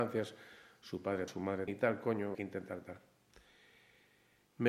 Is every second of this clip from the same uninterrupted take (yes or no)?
no